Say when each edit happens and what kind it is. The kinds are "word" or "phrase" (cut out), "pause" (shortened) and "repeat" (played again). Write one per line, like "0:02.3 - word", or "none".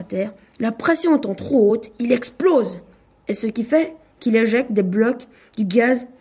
none

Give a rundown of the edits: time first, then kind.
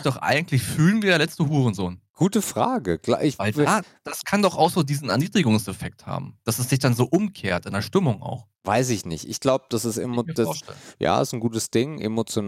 0:02.1 - pause
0:08.5 - pause

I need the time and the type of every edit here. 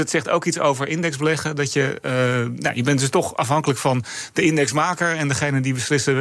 none

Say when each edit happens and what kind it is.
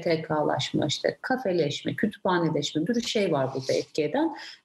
0:02.9 - word

